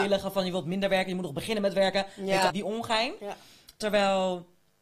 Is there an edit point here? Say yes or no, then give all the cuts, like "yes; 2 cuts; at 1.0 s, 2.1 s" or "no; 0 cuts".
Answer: yes; 1 cut; at 2.5 s